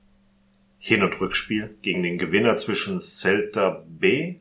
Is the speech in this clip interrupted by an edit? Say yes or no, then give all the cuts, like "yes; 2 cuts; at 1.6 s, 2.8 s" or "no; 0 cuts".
no; 0 cuts